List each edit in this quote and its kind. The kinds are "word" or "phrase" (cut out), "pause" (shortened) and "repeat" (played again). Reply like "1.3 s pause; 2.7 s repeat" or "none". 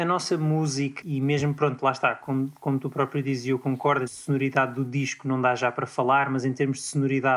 1.0 s word; 4.1 s phrase